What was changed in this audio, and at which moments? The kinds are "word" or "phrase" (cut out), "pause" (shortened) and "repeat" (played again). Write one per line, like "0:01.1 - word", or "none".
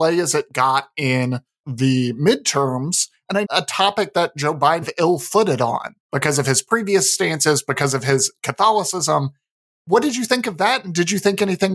0:03.4 - phrase
0:04.8 - phrase
0:06.0 - pause